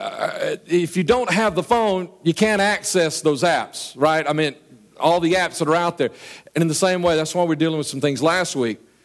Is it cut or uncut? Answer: uncut